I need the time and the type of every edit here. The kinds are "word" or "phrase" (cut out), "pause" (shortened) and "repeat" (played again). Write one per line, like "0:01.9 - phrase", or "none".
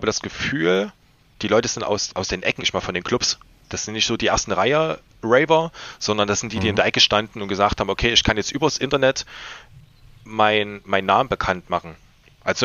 0:01.3 - word
0:02.1 - word
0:02.6 - word